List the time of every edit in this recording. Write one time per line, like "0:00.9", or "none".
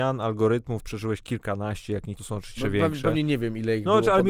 0:02.2
0:02.6